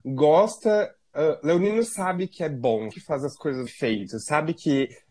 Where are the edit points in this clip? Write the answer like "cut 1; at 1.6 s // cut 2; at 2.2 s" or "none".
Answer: cut 1; at 2.9 s // cut 2; at 3.7 s

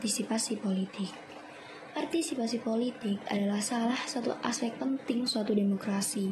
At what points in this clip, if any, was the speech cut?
none

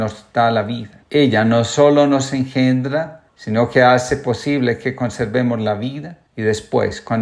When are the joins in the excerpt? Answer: cut 1; at 1.0 s // cut 2; at 3.3 s // cut 3; at 6.3 s

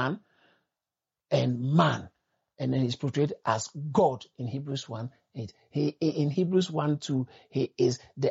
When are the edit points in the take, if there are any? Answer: none

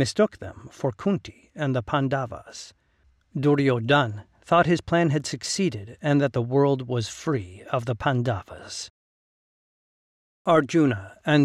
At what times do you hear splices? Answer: none

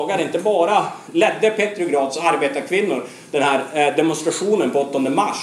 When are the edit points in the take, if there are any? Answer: none

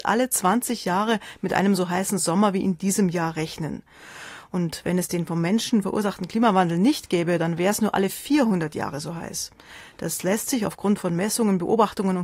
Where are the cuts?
none

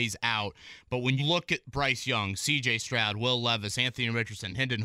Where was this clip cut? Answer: cut 1; at 1.2 s

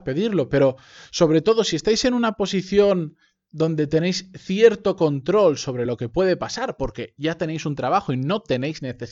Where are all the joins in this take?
none

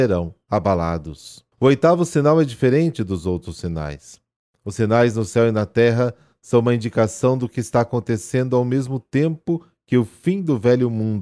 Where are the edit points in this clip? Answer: cut 1; at 1.5 s

